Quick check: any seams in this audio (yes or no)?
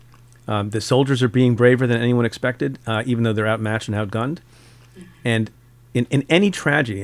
no